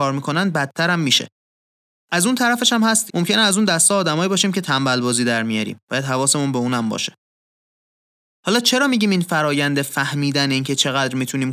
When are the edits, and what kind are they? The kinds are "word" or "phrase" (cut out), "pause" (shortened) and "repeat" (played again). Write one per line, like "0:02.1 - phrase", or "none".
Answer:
0:03.1 - word